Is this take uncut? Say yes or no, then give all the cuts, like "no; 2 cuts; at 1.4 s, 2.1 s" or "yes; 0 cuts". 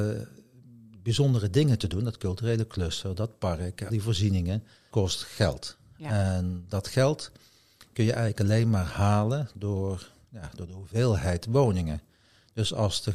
no; 2 cuts; at 3.9 s, 4.9 s